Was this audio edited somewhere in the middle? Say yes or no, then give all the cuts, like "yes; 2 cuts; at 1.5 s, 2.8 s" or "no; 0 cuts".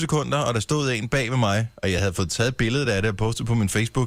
no; 0 cuts